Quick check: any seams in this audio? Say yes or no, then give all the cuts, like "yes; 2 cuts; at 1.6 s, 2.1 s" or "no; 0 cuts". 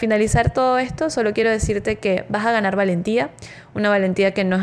no; 0 cuts